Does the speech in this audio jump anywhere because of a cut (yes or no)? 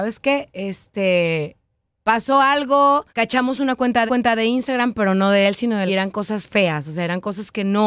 yes